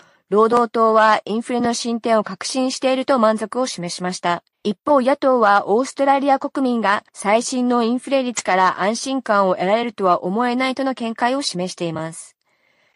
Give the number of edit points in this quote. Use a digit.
2